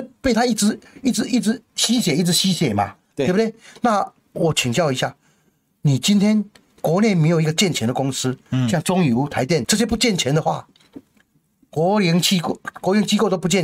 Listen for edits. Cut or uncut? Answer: cut